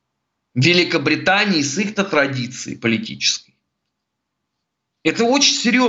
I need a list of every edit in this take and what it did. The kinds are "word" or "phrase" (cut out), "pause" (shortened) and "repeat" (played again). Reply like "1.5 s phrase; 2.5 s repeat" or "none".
none